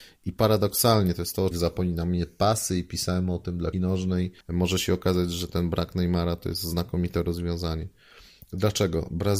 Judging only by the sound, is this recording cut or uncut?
cut